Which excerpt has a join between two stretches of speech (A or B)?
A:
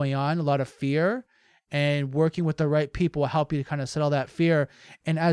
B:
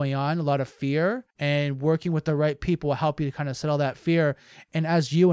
B